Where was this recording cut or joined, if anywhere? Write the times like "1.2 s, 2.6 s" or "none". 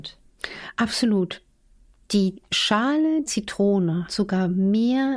3.3 s, 4.1 s